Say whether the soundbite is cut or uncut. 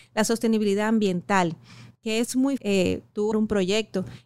cut